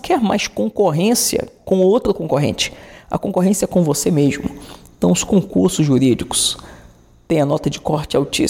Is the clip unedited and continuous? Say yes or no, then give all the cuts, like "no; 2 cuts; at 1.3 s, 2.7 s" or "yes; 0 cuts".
yes; 0 cuts